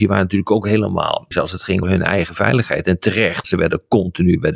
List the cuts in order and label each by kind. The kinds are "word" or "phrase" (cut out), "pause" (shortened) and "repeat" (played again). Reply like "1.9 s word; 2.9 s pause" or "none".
1.3 s word; 1.8 s word; 3.4 s word

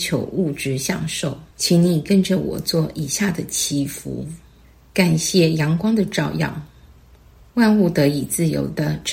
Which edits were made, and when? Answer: 1.5 s pause; 4.6 s pause

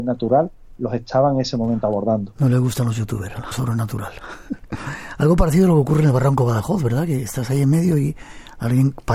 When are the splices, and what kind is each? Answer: 3.5 s phrase

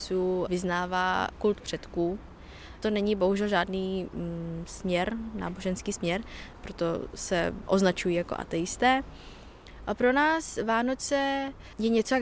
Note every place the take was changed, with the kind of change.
none

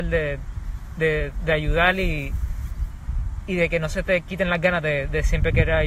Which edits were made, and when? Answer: none

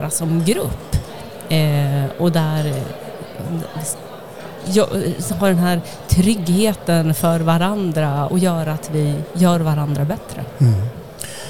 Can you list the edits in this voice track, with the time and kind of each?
8.3 s word

